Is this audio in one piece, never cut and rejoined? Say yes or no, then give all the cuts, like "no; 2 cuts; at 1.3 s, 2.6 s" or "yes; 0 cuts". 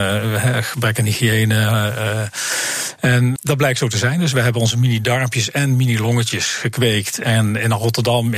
no; 1 cut; at 3.4 s